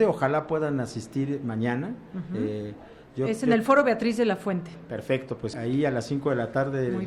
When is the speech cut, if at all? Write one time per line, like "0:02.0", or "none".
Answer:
0:05.5